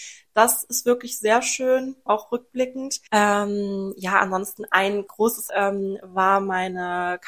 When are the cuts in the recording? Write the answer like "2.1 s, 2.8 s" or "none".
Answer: 2.1 s, 3.1 s, 5.1 s, 5.5 s